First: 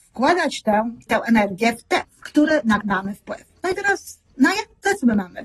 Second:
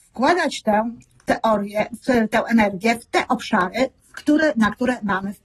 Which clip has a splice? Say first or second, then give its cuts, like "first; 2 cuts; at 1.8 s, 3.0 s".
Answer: first; 3 cuts; at 1.1 s, 2.0 s, 2.8 s